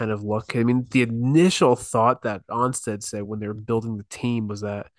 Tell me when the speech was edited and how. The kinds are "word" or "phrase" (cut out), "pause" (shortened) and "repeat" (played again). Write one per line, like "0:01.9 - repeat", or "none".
none